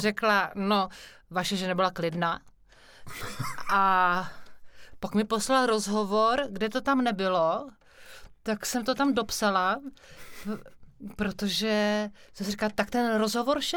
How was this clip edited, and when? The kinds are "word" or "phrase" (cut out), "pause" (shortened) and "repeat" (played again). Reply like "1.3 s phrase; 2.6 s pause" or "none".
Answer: none